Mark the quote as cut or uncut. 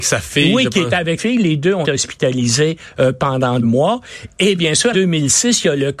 cut